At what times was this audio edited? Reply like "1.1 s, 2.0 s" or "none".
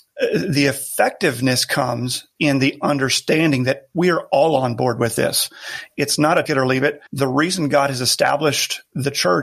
2.4 s, 6.5 s, 7.1 s